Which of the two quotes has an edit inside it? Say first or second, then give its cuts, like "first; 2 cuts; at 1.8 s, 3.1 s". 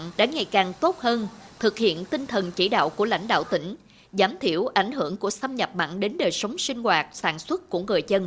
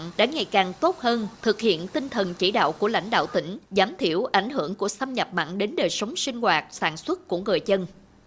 second; 2 cuts; at 1.3 s, 3.7 s